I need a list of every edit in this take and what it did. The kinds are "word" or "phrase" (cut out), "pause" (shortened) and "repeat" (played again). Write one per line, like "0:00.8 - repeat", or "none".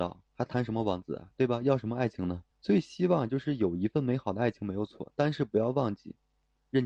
0:02.5 - pause